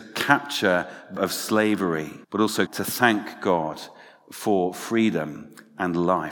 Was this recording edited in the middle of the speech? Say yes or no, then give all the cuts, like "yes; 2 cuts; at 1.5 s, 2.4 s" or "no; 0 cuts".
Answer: yes; 3 cuts; at 1.2 s, 2.2 s, 2.7 s